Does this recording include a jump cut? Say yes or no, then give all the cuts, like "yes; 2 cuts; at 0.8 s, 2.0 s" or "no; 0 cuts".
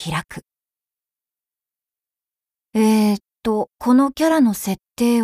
yes; 1 cut; at 3.7 s